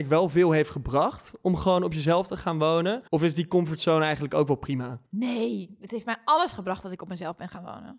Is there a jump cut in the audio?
yes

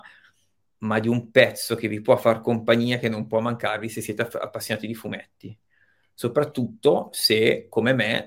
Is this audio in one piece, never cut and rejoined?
yes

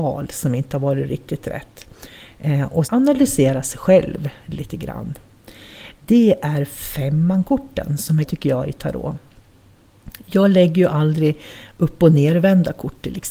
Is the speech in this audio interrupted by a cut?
yes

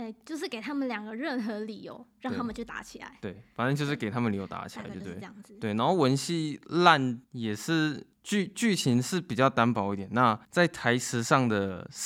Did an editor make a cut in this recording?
yes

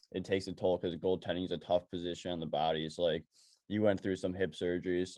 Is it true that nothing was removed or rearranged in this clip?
yes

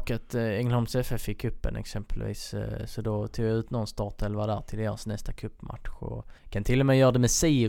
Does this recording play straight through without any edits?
no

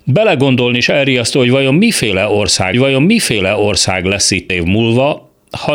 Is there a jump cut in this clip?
yes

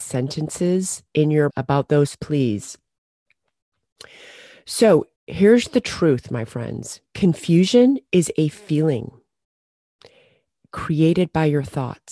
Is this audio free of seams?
no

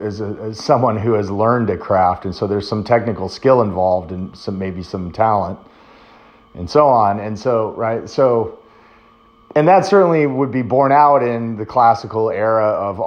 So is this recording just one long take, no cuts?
yes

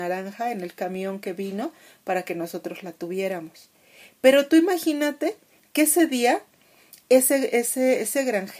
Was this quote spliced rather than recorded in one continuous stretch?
no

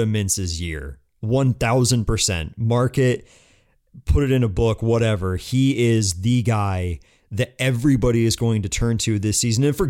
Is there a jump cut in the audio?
no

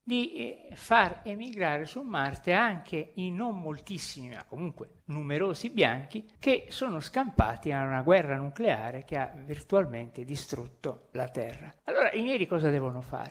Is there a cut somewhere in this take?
yes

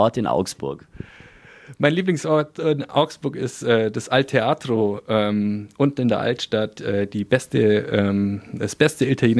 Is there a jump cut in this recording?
no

